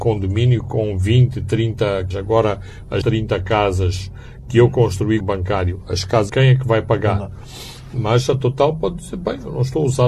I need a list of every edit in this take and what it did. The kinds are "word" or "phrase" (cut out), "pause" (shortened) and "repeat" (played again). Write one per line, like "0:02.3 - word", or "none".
0:02.1 - word
0:03.0 - word
0:05.2 - phrase
0:06.3 - phrase